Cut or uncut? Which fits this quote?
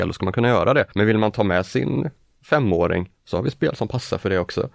cut